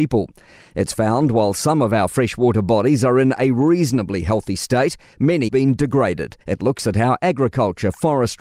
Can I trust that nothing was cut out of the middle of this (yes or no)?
no